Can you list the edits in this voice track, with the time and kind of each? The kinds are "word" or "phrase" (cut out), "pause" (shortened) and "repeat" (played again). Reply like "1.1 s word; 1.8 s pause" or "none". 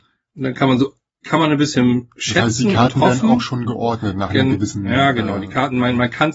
none